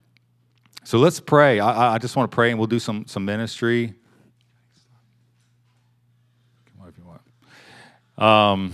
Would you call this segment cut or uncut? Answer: uncut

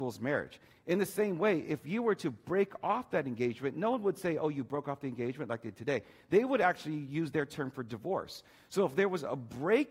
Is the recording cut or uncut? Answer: uncut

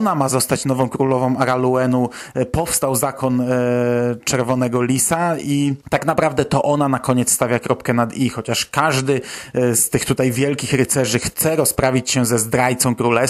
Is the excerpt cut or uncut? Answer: cut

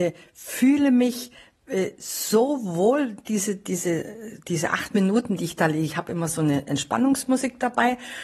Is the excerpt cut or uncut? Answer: uncut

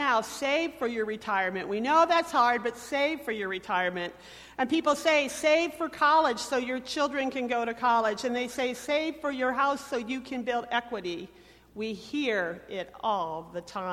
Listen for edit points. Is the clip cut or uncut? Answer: uncut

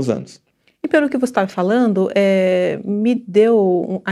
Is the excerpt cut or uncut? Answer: uncut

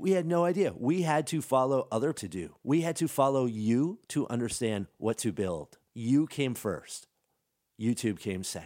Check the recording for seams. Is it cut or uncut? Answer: cut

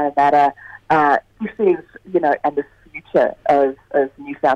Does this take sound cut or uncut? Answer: cut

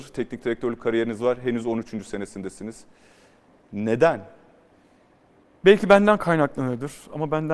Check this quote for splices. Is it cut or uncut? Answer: uncut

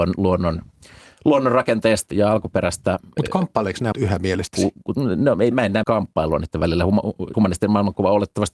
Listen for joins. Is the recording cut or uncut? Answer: cut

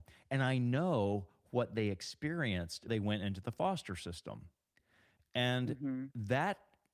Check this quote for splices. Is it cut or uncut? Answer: cut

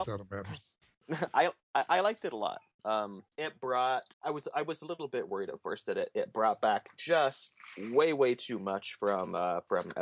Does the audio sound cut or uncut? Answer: cut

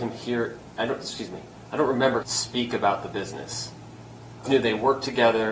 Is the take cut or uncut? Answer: cut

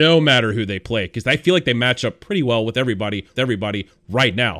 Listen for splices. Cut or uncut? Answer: cut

